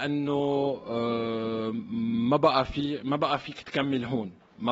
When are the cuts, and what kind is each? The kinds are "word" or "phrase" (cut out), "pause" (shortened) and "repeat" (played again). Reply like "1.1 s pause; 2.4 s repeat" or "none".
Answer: none